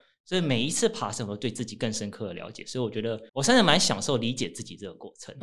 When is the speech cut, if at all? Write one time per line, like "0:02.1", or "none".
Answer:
0:03.3